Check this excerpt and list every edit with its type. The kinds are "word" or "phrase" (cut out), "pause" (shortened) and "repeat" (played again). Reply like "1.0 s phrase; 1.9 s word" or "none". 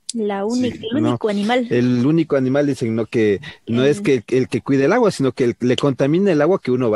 none